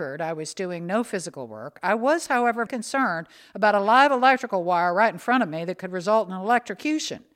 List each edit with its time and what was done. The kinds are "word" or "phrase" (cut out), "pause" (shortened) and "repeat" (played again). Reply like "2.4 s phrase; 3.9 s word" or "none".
2.7 s word